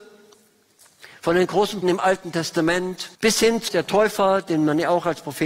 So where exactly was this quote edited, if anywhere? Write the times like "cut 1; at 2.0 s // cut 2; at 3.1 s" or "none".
cut 1; at 1.8 s // cut 2; at 3.1 s // cut 3; at 3.7 s